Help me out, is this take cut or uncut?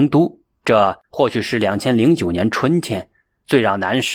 cut